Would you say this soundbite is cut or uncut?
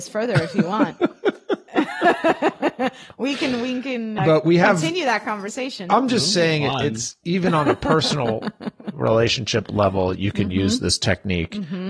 cut